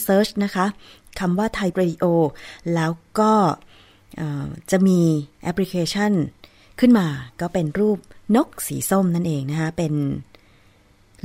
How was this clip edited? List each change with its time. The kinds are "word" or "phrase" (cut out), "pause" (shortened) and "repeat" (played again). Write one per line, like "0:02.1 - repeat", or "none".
0:01.7 - word